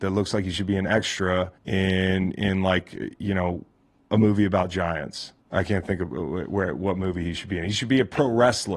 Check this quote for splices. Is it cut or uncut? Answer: cut